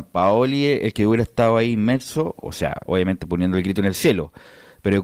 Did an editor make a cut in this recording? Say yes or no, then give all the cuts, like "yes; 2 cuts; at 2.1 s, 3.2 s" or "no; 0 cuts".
yes; 1 cut; at 2.9 s